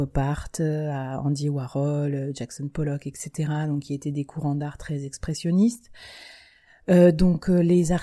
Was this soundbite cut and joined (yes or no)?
no